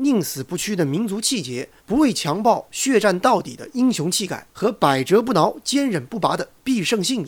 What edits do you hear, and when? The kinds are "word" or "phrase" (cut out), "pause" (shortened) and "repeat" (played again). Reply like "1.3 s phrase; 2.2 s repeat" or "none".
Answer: 1.8 s pause; 4.5 s pause